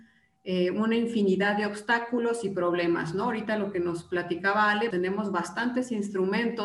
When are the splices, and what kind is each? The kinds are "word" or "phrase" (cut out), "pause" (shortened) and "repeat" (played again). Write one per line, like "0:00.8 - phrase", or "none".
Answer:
0:04.9 - word